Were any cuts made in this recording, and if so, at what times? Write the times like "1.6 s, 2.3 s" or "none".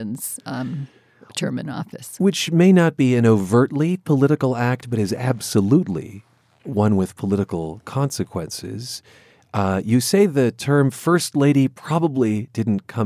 none